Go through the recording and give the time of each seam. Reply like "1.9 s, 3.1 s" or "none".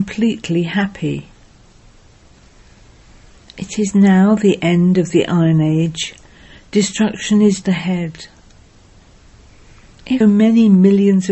7.6 s, 10.2 s